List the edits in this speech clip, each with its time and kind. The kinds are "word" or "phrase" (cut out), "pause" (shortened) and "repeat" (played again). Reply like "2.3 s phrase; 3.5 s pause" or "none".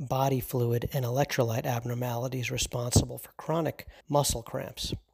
4.0 s pause